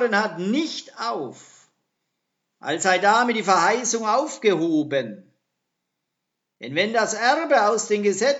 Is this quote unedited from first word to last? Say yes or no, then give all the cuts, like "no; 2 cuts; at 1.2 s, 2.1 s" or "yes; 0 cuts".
yes; 0 cuts